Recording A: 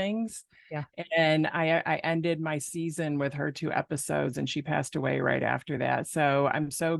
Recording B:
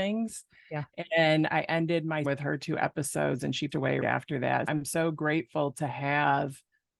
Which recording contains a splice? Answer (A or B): B